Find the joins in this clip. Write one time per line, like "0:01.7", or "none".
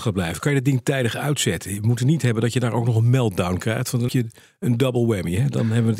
0:04.1

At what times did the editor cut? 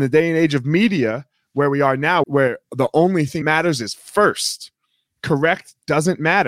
0:02.2
0:03.4

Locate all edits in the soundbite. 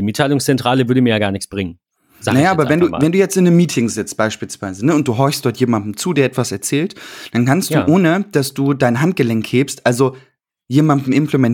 none

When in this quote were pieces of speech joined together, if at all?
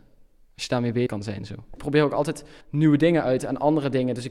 0:01.1
0:02.6

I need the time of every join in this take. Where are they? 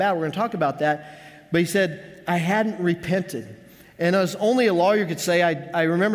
none

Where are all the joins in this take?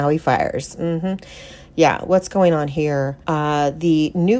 0:03.2

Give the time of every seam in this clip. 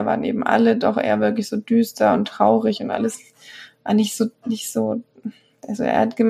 none

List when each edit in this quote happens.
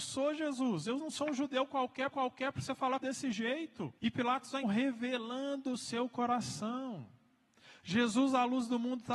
0:02.1
0:03.0
0:04.0
0:04.6

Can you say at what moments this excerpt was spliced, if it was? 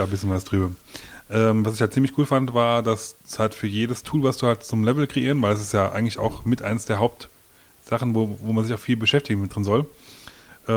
0:03.2

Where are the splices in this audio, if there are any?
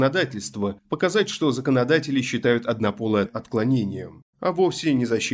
0:03.3

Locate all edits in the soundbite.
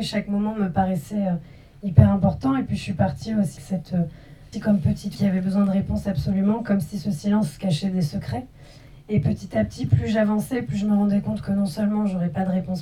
0:03.6
0:04.5
0:05.1

